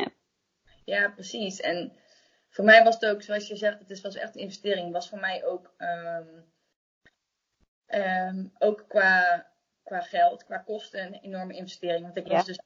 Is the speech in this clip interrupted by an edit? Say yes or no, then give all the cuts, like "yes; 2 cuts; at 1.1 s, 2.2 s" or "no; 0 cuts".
no; 0 cuts